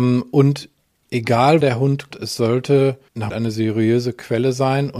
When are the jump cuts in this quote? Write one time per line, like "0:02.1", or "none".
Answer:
0:01.6
0:02.1
0:03.3